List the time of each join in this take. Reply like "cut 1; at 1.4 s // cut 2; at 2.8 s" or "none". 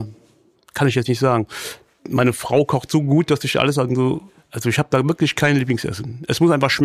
none